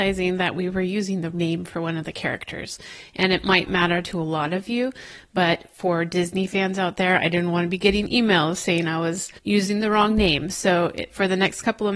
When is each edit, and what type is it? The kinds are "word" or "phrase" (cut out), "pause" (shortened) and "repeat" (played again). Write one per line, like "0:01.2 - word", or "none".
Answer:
0:01.3 - word
0:03.7 - word
0:09.4 - pause